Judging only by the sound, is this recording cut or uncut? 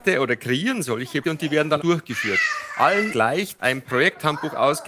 cut